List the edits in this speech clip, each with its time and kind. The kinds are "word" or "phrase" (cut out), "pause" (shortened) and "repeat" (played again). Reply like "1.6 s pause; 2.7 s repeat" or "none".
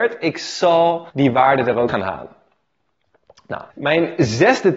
1.1 s pause; 1.9 s word; 3.7 s pause